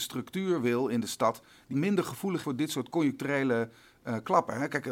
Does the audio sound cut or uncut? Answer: cut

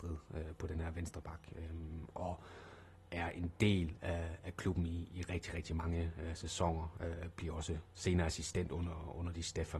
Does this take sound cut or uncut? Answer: uncut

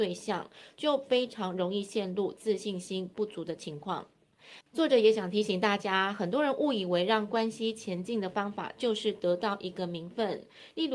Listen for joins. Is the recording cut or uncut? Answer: cut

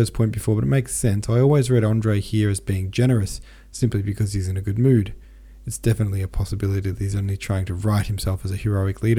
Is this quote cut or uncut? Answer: uncut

